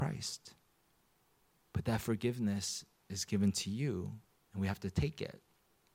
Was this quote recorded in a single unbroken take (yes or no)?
no